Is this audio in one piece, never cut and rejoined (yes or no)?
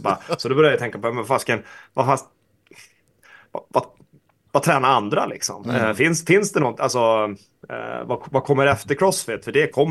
yes